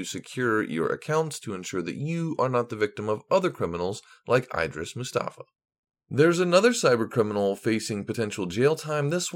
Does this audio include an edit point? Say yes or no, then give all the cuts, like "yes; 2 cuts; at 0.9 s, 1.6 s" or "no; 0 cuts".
no; 0 cuts